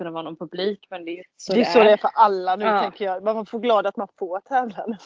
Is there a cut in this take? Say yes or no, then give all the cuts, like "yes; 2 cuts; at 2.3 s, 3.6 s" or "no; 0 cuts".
yes; 1 cut; at 1.2 s